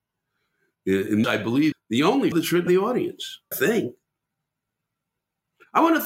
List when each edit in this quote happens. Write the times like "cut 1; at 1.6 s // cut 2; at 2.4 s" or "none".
cut 1; at 1.2 s // cut 2; at 1.7 s // cut 3; at 2.3 s // cut 4; at 2.7 s // cut 5; at 3.5 s